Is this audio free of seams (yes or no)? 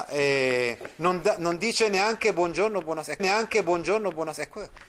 no